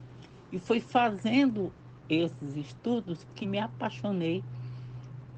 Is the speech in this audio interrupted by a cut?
yes; 1 cut; at 3.4 s

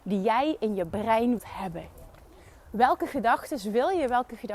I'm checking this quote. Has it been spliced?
yes; 1 cut; at 1.4 s

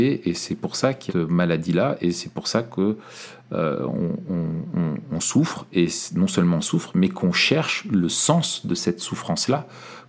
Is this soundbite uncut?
no; 1 cut; at 1.1 s

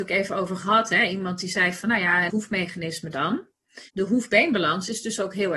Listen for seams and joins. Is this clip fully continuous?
no; 2 cuts; at 2.3 s, 3.9 s

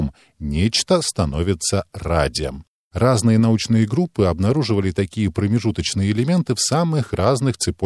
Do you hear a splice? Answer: no; 0 cuts

